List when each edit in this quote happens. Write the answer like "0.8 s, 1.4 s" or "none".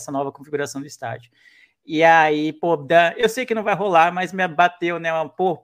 none